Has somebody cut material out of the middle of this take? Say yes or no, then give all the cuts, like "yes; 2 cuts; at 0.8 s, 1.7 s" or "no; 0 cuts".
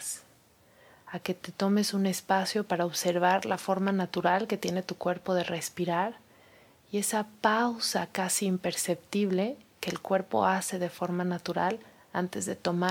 no; 0 cuts